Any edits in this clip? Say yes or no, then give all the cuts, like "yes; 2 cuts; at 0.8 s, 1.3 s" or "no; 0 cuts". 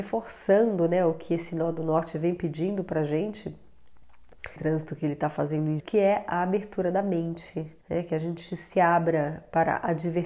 yes; 3 cuts; at 4.6 s, 5.8 s, 7.8 s